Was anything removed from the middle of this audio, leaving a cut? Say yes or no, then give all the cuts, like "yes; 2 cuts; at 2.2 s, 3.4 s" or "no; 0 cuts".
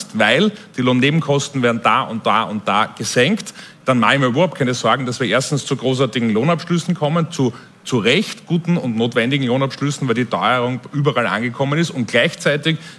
no; 0 cuts